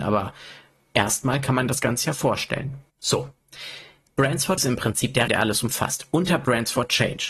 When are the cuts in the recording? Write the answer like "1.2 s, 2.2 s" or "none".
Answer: 2.9 s, 4.6 s, 5.3 s